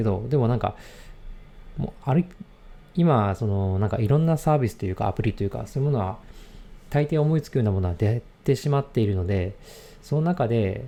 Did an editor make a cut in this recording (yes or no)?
no